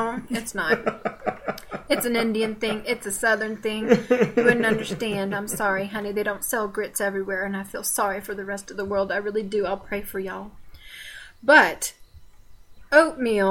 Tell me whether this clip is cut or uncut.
uncut